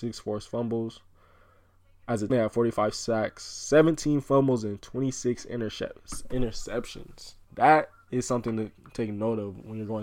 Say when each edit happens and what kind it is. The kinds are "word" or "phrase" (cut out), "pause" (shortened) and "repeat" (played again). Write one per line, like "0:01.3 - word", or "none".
0:02.3 - word
0:07.4 - pause